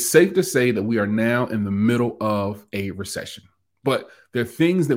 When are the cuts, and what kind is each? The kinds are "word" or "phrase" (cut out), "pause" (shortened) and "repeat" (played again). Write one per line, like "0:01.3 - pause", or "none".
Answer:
none